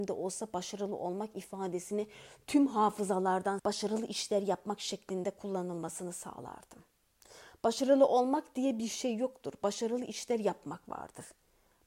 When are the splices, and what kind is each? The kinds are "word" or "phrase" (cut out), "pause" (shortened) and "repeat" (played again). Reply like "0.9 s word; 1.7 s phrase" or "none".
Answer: 3.6 s word